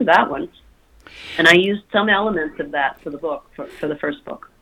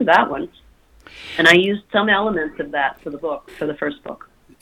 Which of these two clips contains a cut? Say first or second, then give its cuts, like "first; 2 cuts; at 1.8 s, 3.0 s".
second; 1 cut; at 3.5 s